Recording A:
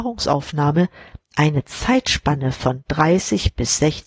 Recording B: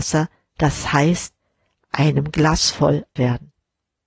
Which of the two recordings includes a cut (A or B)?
B